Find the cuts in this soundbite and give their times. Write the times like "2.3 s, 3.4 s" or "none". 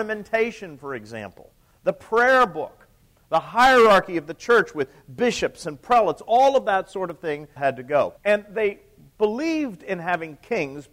7.6 s, 8.2 s